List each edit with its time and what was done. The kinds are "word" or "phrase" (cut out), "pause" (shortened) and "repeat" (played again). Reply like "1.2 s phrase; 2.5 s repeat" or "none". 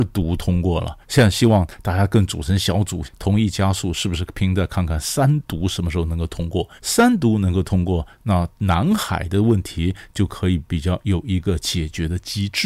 1.0 s pause; 3.0 s phrase; 6.8 s pause